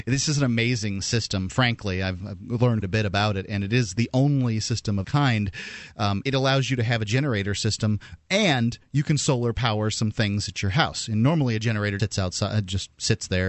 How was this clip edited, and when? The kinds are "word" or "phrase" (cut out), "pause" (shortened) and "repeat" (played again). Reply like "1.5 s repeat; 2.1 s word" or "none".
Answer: 2.2 s word; 2.8 s word; 5.0 s word; 6.2 s word; 12.0 s word